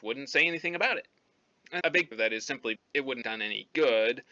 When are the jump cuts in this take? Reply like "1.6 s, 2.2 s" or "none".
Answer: 1.8 s, 2.1 s, 2.8 s, 3.2 s